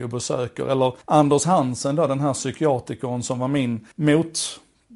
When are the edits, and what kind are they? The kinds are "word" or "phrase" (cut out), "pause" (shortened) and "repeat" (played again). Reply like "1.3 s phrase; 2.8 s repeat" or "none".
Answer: 1.0 s pause; 3.9 s pause